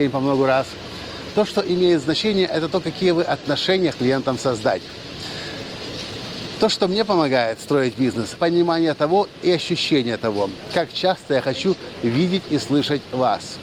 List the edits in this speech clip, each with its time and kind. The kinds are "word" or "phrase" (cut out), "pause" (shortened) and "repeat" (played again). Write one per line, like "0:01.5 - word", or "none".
0:03.9 - word
0:08.4 - word